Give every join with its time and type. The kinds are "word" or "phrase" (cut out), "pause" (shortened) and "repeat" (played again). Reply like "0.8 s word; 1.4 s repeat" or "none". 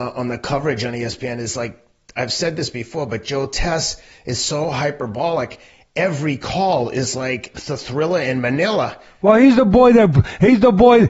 none